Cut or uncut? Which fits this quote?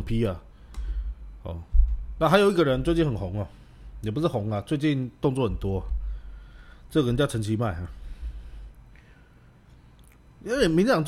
uncut